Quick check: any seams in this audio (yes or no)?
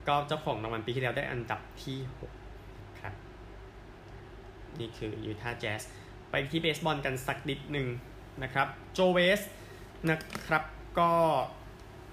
no